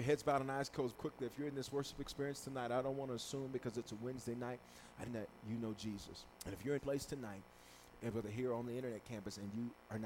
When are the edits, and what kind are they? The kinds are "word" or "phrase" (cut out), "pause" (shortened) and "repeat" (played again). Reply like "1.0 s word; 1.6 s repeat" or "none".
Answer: 0.9 s word; 5.1 s phrase; 6.3 s pause; 6.8 s phrase